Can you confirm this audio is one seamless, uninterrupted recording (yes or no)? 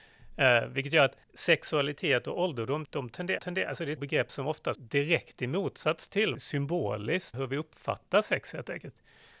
no